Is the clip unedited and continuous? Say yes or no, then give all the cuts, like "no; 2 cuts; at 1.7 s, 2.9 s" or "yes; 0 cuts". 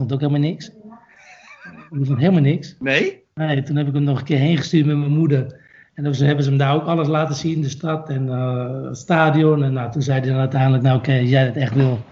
yes; 0 cuts